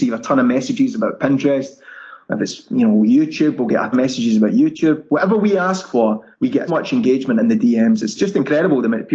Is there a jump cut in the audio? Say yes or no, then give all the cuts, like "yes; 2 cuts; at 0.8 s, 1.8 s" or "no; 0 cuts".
yes; 3 cuts; at 3.9 s, 6.3 s, 6.7 s